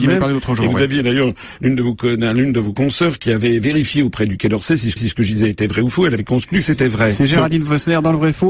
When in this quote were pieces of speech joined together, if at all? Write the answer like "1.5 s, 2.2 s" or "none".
5.0 s

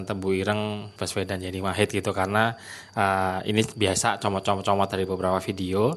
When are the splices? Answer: 1.0 s

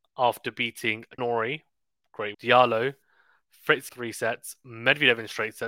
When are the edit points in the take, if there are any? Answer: 1.2 s, 2.3 s, 3.9 s

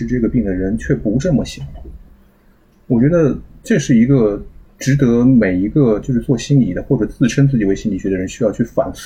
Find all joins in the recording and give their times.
none

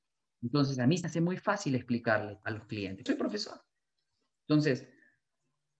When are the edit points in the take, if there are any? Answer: 1.0 s, 2.4 s, 3.1 s

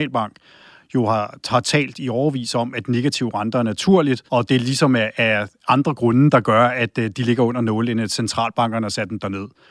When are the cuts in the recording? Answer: 4.3 s

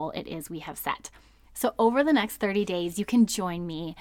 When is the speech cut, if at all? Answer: none

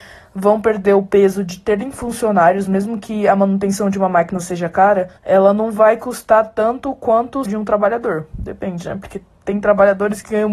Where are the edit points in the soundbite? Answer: 5.2 s, 7.5 s

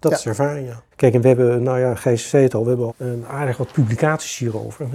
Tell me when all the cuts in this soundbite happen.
0.9 s, 2.9 s

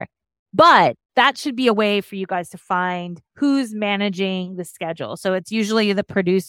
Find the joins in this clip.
3.3 s

